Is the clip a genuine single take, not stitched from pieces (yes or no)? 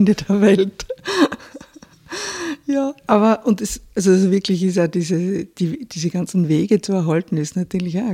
yes